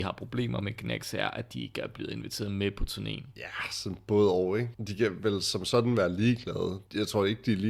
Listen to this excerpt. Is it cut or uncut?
uncut